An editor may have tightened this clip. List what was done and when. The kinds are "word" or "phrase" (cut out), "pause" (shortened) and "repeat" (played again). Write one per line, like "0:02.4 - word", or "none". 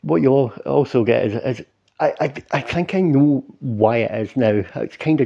none